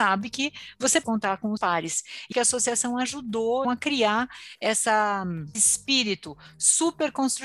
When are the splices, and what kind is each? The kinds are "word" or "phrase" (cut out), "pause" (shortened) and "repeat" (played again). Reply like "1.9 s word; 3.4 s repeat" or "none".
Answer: 1.0 s word; 1.6 s word; 2.3 s word; 3.6 s word; 5.5 s word